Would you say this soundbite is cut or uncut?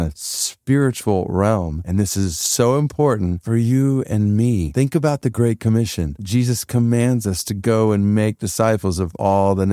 uncut